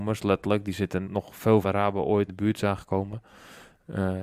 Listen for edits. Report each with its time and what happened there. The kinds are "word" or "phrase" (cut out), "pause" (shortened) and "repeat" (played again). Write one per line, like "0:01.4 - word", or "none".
0:01.1 - word
0:01.6 - phrase
0:02.3 - word